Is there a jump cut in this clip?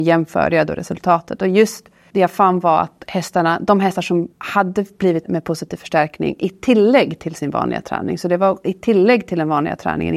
yes; 3 cuts; at 2.1 s, 4.3 s, 5.2 s

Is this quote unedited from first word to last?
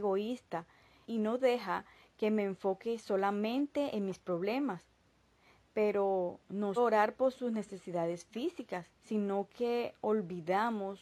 no; 2 cuts; at 6.8 s, 8.9 s

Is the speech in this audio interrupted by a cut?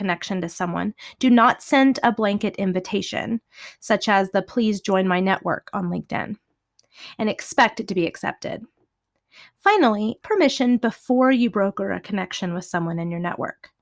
yes; 1 cut; at 10.2 s

